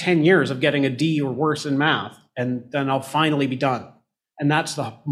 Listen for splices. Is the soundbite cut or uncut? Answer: uncut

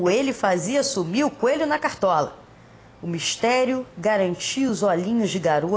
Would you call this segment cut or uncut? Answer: uncut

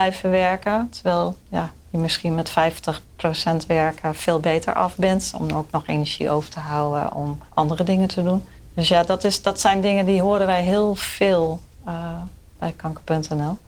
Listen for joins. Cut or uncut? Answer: cut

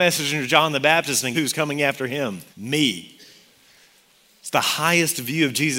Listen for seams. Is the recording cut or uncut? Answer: cut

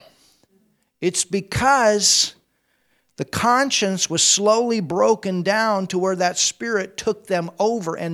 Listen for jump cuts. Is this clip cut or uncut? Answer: uncut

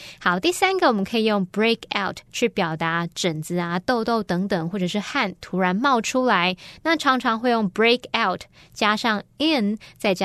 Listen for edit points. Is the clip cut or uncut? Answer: uncut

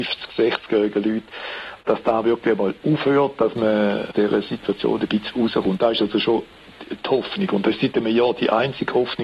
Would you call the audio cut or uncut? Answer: uncut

